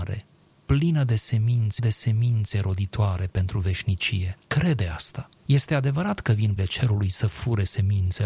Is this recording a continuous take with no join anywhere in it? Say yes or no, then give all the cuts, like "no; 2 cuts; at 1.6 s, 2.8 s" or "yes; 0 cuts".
no; 4 cuts; at 1.8 s, 4.4 s, 5.4 s, 6.6 s